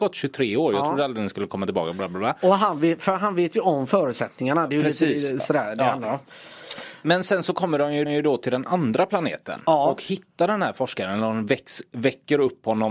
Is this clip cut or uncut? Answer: cut